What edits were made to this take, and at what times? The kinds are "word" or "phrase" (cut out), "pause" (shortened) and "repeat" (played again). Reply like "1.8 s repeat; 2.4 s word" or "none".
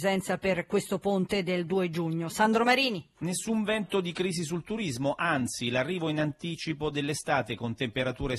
3.1 s pause